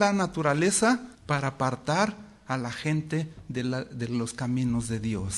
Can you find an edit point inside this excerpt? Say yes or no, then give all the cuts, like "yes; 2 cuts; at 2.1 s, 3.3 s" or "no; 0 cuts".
yes; 1 cut; at 1.1 s